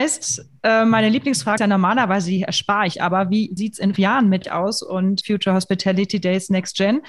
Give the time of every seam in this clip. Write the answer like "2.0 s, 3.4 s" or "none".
1.6 s, 2.9 s, 3.6 s, 4.0 s, 4.4 s, 5.2 s